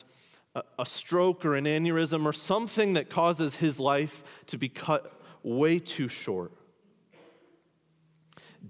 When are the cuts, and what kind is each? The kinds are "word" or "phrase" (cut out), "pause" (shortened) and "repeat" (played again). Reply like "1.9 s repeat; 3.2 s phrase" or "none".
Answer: none